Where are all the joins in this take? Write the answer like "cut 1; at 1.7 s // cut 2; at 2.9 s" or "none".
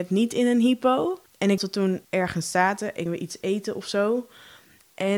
cut 1; at 1.3 s // cut 2; at 1.6 s // cut 3; at 2.0 s // cut 4; at 3.1 s